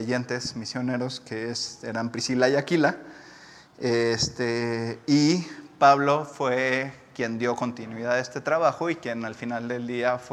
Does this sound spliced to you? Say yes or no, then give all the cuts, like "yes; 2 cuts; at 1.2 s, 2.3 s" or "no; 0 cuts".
no; 0 cuts